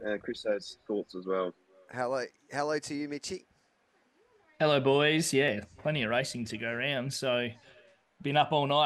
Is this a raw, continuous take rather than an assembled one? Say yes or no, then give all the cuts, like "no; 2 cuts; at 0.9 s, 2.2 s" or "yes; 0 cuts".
yes; 0 cuts